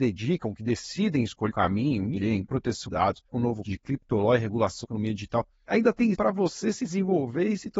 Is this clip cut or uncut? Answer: cut